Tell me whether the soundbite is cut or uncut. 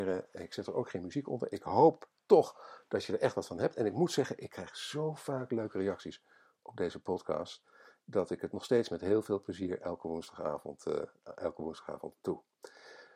uncut